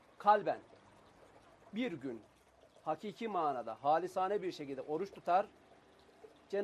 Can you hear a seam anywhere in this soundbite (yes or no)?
no